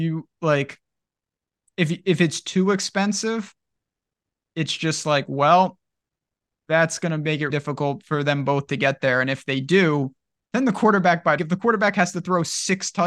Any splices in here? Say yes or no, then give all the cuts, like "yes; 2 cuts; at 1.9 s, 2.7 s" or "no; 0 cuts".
yes; 2 cuts; at 7.5 s, 11.4 s